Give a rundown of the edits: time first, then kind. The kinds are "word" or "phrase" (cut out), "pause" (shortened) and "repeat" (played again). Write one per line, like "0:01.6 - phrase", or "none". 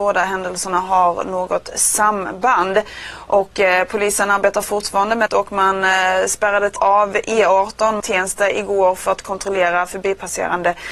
0:05.3 - phrase
0:06.8 - phrase
0:08.0 - word